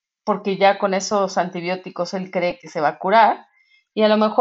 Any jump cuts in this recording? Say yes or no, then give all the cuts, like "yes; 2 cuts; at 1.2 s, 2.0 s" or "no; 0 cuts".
no; 0 cuts